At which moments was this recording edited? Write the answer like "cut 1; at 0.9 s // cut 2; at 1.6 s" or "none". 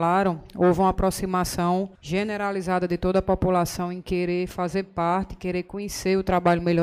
cut 1; at 1.9 s